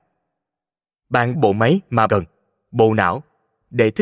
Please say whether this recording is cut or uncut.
cut